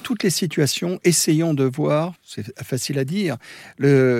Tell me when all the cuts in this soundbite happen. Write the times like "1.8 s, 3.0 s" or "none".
2.2 s

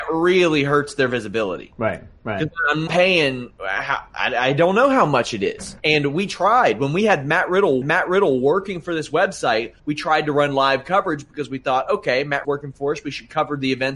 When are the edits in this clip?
2.9 s, 5.8 s, 7.8 s, 9.8 s, 12.4 s

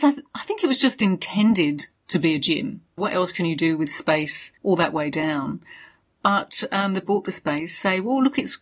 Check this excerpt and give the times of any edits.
3.0 s, 4.6 s, 7.0 s

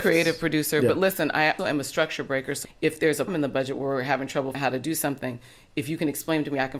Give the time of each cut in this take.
1.6 s, 2.6 s, 3.3 s, 4.5 s

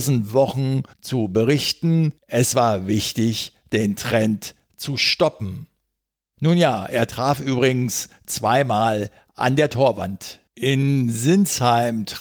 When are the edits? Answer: 0.9 s, 2.2 s, 10.5 s

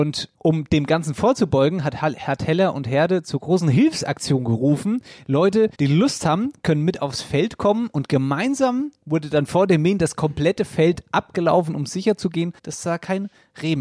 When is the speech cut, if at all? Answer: 5.7 s, 12.6 s

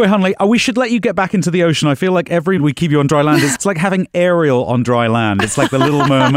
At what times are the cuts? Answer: 2.6 s, 3.6 s

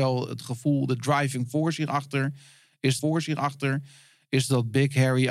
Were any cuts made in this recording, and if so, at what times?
3.0 s

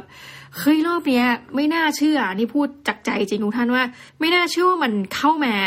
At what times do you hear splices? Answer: 4.1 s

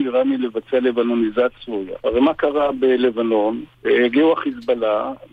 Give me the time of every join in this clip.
1.6 s, 2.0 s, 3.7 s

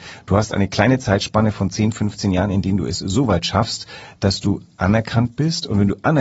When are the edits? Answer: none

